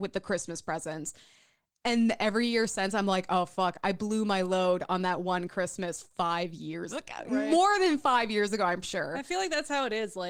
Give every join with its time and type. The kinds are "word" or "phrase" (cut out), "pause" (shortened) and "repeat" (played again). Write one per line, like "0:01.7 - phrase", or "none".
0:08.8 - word